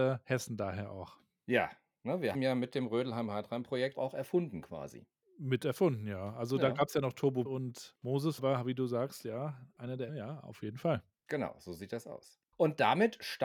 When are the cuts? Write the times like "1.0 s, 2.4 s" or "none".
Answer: 2.3 s, 3.9 s, 7.5 s, 8.4 s, 10.1 s